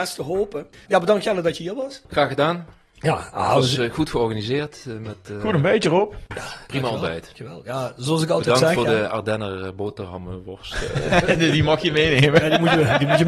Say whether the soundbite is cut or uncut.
uncut